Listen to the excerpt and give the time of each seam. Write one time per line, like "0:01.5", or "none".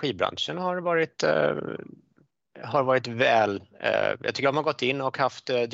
0:04.4